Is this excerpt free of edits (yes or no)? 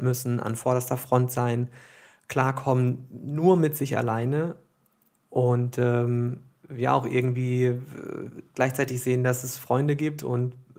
yes